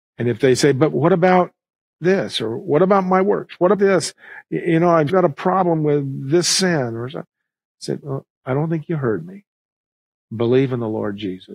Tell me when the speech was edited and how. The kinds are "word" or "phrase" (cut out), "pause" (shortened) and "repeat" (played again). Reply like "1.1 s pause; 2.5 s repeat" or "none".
3.7 s word; 5.1 s word; 8.0 s word